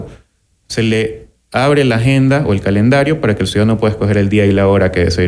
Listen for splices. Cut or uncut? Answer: uncut